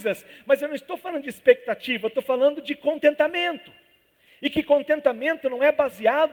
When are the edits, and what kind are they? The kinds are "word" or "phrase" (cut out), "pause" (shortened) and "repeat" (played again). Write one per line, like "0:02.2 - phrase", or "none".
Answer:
none